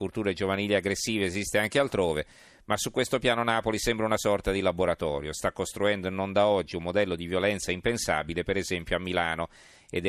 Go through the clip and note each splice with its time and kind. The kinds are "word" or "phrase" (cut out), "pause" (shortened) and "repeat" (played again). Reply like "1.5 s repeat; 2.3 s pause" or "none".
none